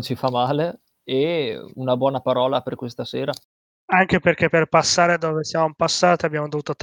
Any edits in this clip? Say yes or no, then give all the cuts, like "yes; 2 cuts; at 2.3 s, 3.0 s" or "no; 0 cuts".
no; 0 cuts